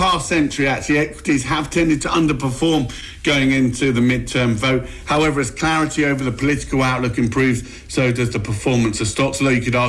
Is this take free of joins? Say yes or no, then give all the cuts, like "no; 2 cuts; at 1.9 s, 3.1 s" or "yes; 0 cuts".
yes; 0 cuts